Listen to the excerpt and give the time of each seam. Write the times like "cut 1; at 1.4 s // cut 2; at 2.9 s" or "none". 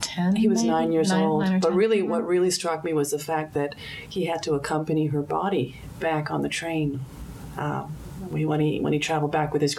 none